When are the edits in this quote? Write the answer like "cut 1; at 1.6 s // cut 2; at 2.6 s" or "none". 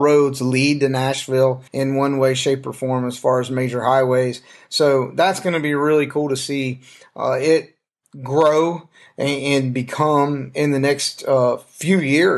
cut 1; at 1.7 s